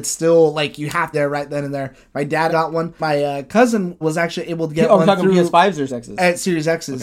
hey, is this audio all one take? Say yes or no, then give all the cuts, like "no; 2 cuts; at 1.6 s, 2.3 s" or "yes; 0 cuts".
no; 5 cuts; at 1.1 s, 2.5 s, 3.0 s, 4.0 s, 5.9 s